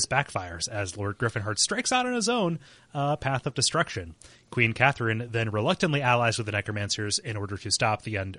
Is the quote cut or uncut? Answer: uncut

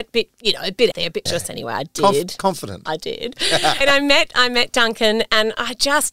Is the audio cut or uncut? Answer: cut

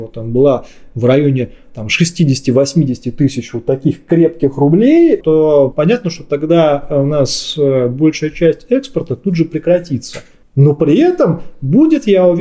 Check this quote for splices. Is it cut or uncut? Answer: uncut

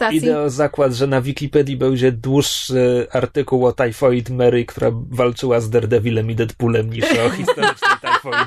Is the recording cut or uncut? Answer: uncut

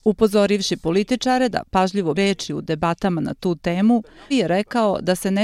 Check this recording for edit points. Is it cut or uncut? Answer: cut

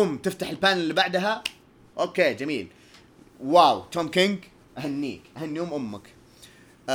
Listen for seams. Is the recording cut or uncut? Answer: cut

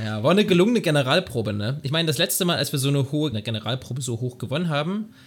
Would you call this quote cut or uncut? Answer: cut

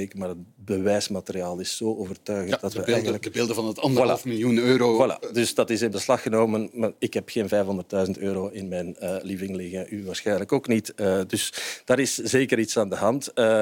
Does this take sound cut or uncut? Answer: uncut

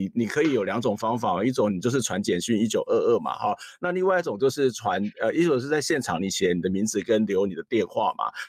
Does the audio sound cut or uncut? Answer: uncut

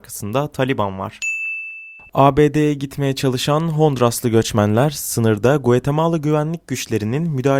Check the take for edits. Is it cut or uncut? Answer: uncut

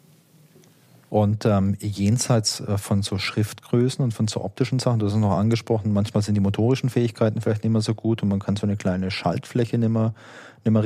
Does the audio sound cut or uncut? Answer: uncut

